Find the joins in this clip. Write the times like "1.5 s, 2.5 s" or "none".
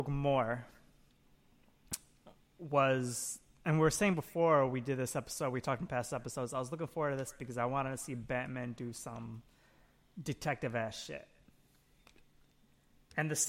none